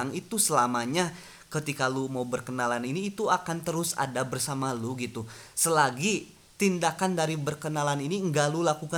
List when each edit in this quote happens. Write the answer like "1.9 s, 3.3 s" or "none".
none

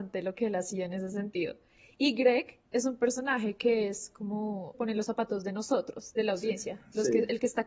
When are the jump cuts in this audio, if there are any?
2.6 s, 4.7 s

